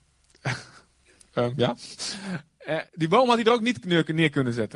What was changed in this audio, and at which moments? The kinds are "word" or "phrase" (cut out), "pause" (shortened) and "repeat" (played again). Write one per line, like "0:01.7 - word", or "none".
0:02.9 - pause